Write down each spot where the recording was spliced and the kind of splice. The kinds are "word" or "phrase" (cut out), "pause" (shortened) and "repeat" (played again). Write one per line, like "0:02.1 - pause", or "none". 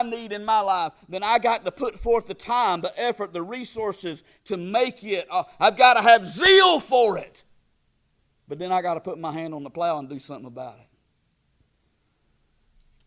none